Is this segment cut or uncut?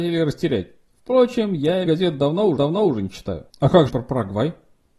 cut